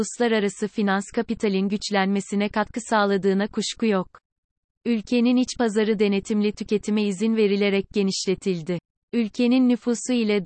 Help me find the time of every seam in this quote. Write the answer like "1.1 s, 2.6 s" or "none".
none